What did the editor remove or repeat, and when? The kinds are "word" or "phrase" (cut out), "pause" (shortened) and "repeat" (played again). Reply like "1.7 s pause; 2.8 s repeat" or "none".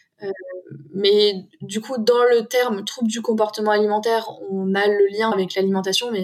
5.3 s word